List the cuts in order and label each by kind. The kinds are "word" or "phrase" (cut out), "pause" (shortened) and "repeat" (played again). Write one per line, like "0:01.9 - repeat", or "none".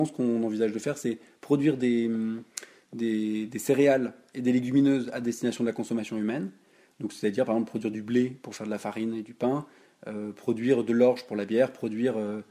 none